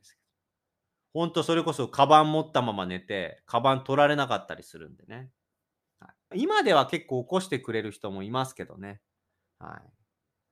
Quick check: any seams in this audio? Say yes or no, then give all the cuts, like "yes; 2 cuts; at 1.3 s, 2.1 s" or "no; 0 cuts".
yes; 1 cut; at 6.3 s